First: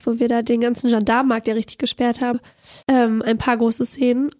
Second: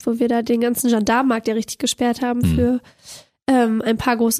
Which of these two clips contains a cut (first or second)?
first